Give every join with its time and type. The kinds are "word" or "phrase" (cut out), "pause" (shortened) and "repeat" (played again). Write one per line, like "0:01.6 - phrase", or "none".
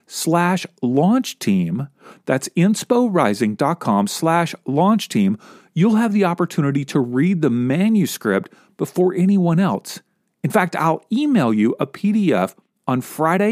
none

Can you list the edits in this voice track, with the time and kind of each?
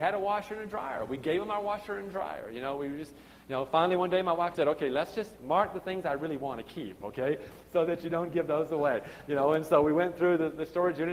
0:04.5 - phrase

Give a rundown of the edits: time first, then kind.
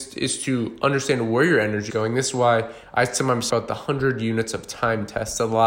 0:01.9 - word
0:03.5 - word

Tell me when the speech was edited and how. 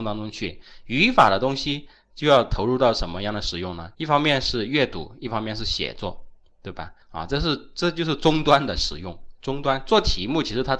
0:03.9 - pause
0:07.0 - pause

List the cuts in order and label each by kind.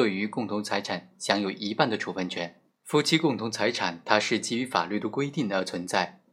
0:02.7 - pause

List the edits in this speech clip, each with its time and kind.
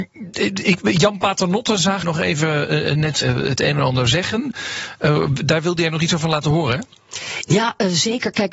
0:02.0 - word
0:03.2 - word

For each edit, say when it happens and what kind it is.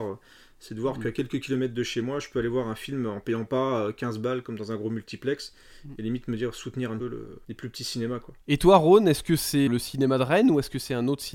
0:07.0 - phrase
0:07.4 - pause
0:08.4 - pause
0:09.7 - word

